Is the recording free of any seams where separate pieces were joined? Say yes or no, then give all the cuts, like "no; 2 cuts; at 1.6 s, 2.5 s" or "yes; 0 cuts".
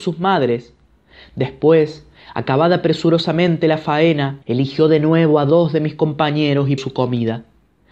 no; 2 cuts; at 4.4 s, 6.8 s